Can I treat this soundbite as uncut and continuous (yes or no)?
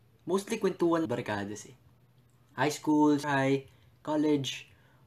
no